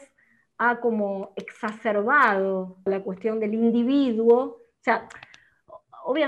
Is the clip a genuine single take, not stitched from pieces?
no; 1 cut; at 2.9 s

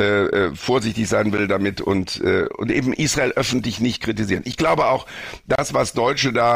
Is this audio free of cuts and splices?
yes; 0 cuts

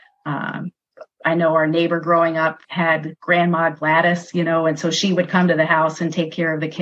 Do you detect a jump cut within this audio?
yes; 1 cut; at 2.6 s

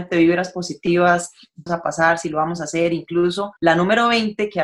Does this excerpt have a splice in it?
yes; 2 cuts; at 1.7 s, 3.6 s

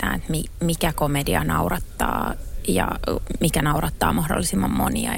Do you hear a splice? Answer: no; 0 cuts

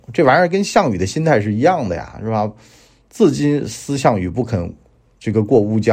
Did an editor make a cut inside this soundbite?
no; 0 cuts

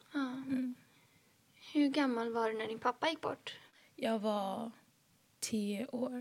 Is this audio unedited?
yes; 0 cuts

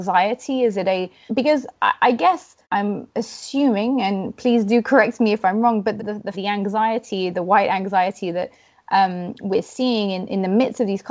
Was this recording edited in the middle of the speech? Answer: yes; 4 cuts; at 1.3 s, 2.6 s, 6.0 s, 6.3 s

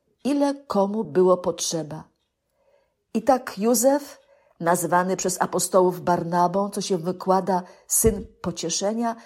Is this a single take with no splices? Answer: yes; 0 cuts

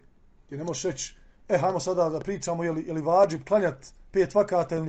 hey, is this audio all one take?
yes; 0 cuts

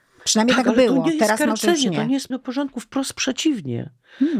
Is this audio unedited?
no; 1 cut; at 2.3 s

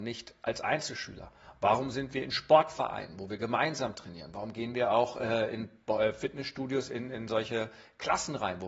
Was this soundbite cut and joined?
no; 0 cuts

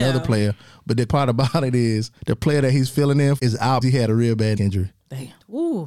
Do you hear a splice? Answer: yes; 5 cuts; at 1.1 s, 2.2 s, 3.4 s, 3.8 s, 4.6 s

